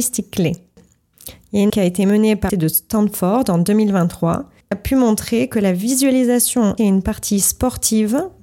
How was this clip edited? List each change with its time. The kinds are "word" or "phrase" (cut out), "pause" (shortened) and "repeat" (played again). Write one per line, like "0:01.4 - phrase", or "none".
0:01.7 - word
0:02.5 - word
0:04.7 - word
0:06.8 - word